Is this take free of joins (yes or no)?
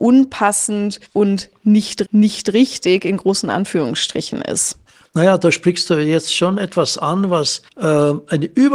no